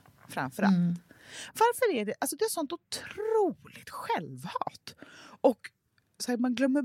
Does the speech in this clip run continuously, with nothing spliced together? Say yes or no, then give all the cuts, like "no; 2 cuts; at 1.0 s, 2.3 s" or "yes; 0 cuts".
no; 1 cut; at 3.8 s